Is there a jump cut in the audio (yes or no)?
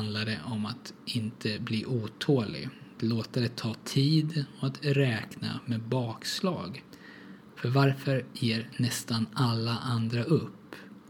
no